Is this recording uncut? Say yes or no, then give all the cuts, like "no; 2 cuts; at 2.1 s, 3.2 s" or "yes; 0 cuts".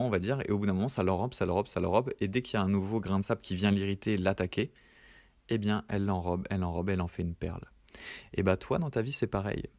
yes; 0 cuts